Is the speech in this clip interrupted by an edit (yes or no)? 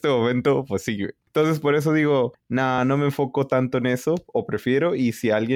no